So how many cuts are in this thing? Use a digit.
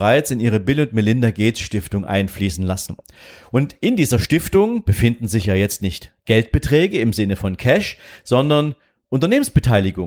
0